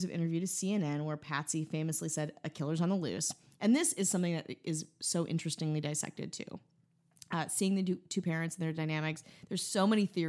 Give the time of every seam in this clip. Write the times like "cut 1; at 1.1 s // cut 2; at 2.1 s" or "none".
none